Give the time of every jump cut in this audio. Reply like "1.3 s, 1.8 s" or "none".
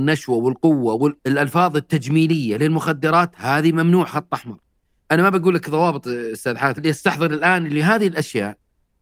1.2 s, 4.7 s, 6.8 s